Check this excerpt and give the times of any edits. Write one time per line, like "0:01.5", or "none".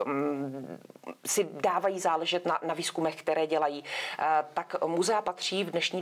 none